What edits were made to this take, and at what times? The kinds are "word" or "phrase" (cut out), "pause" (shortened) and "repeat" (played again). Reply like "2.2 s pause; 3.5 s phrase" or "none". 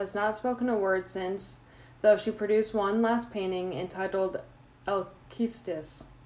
none